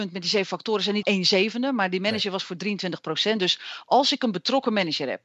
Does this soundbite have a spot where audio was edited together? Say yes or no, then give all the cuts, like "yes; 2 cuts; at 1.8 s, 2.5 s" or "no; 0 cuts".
yes; 1 cut; at 1.0 s